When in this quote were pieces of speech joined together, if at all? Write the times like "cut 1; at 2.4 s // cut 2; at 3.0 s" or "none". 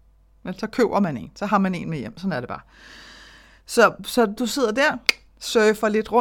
cut 1; at 4.4 s